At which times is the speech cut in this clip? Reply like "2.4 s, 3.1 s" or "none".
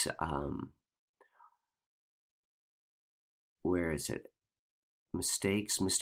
none